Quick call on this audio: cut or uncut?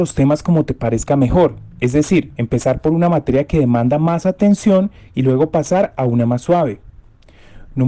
cut